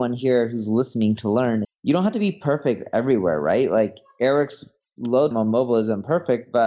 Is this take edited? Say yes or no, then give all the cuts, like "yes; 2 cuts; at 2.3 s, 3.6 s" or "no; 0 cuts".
yes; 2 cuts; at 1.6 s, 5.3 s